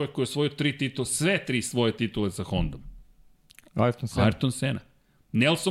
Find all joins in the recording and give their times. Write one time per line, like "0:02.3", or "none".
none